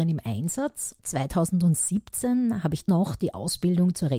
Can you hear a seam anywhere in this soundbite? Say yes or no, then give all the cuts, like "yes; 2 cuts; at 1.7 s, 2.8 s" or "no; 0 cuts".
yes; 2 cuts; at 1.0 s, 2.9 s